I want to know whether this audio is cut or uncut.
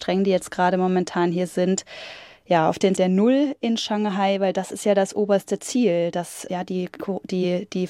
cut